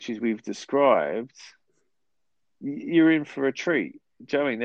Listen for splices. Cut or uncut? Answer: uncut